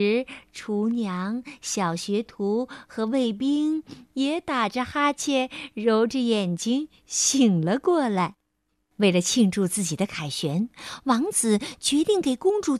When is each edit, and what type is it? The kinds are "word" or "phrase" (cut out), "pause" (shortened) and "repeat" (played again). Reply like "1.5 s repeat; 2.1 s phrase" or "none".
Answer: 8.7 s pause